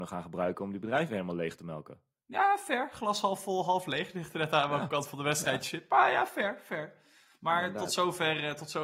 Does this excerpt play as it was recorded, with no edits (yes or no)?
yes